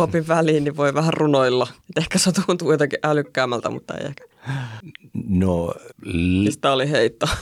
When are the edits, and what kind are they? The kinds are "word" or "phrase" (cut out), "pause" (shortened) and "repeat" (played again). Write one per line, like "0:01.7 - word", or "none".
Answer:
none